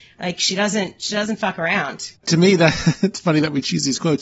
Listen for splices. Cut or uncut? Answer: cut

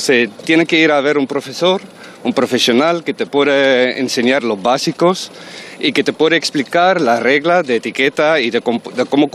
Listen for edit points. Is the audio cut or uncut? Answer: uncut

